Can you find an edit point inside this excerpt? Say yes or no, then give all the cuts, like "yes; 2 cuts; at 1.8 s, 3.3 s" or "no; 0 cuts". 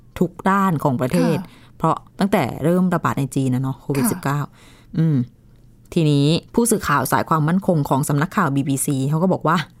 yes; 2 cuts; at 2.1 s, 6.5 s